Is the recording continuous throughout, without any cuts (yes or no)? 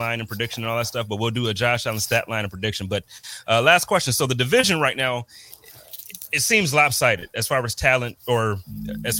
yes